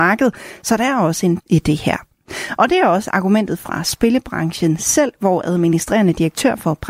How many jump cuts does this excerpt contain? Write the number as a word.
one